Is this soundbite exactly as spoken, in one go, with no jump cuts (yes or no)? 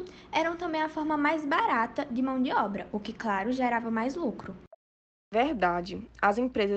yes